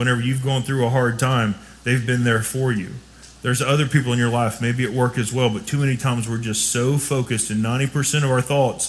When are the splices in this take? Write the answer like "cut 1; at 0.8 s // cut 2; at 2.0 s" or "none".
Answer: none